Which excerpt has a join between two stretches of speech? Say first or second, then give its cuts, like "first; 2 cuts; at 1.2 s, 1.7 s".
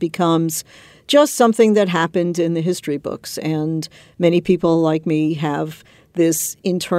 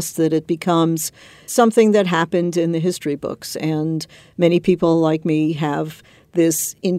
second; 1 cut; at 1.5 s